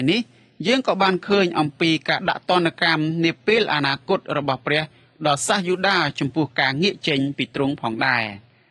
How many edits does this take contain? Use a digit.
0